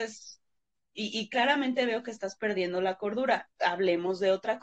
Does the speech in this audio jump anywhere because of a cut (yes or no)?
yes